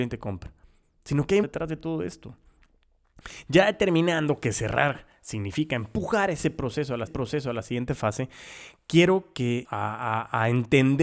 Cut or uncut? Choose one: cut